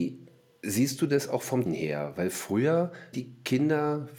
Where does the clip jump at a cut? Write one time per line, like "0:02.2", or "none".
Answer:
0:01.7
0:03.1